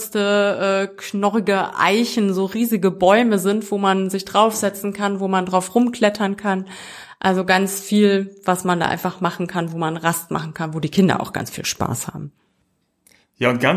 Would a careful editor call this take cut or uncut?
uncut